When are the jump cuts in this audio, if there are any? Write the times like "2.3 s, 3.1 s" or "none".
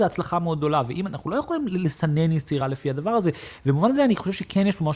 none